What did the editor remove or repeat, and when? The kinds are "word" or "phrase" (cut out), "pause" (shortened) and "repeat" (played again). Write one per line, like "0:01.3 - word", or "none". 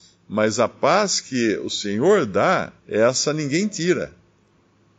0:02.8 - pause